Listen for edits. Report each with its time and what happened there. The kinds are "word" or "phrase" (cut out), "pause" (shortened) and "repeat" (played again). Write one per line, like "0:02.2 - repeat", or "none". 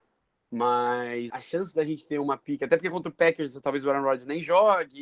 0:01.3 - word